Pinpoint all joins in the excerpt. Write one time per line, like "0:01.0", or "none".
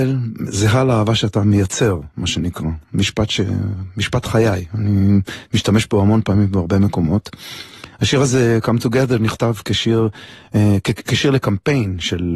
none